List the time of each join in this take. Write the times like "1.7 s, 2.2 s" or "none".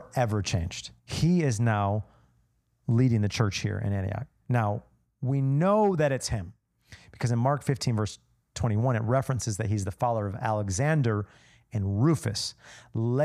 1.0 s